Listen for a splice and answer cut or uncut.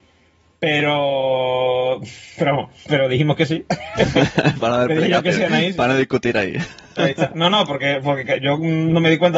uncut